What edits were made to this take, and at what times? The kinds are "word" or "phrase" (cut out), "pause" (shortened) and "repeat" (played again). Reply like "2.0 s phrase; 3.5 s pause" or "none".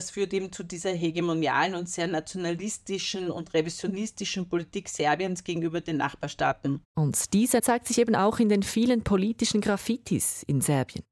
6.9 s pause; 7.6 s phrase